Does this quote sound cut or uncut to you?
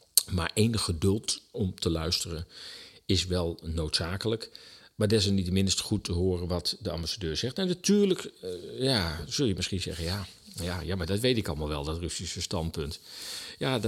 uncut